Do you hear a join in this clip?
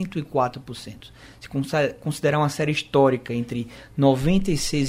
no; 0 cuts

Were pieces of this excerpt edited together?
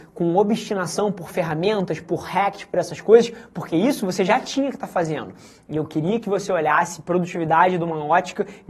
no; 0 cuts

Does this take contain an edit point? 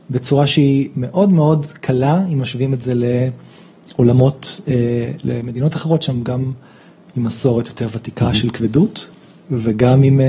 no; 0 cuts

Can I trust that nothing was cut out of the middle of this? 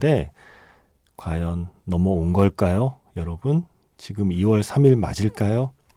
yes; 0 cuts

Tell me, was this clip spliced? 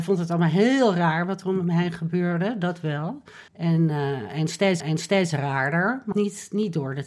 yes; 3 cuts; at 3.5 s, 4.8 s, 6.1 s

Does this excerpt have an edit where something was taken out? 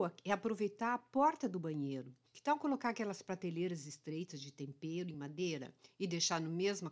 no; 0 cuts

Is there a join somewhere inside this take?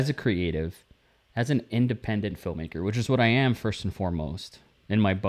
no; 0 cuts

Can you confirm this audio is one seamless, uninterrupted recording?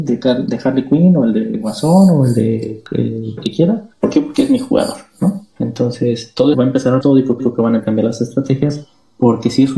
no; 7 cuts; at 3.4 s, 3.9 s, 5.5 s, 6.5 s, 7.0 s, 7.4 s, 7.8 s

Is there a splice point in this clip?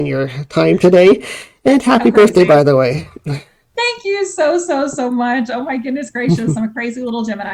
no; 0 cuts

